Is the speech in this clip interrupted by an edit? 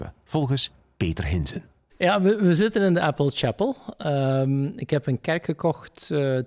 no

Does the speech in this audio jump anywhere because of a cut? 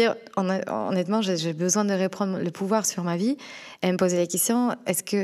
no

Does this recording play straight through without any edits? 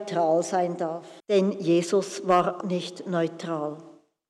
no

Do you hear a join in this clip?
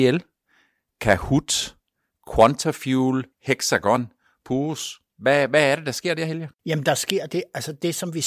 yes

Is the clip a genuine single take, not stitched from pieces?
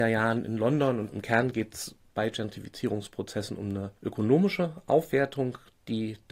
no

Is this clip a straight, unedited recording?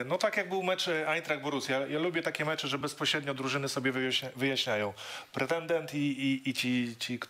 yes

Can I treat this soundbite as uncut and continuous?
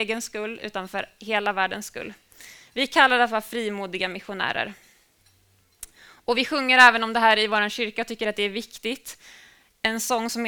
yes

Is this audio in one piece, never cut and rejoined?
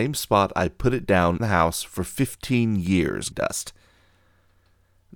no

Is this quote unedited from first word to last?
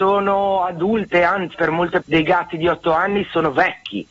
no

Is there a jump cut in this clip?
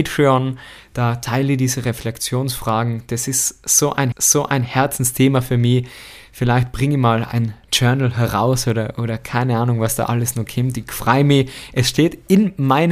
yes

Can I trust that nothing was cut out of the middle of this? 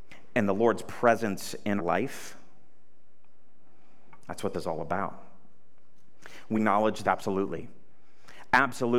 no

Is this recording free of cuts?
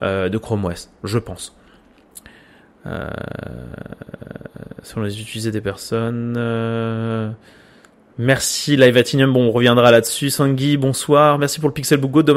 yes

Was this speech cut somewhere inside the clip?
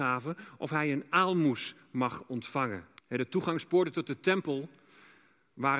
yes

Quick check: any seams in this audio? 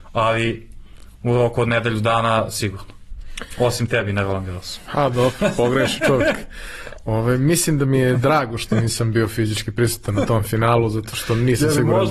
no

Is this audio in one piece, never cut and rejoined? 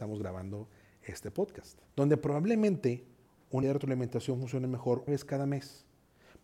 no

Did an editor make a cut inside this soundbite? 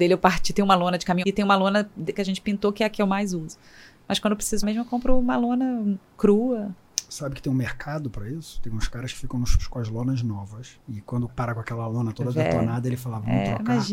yes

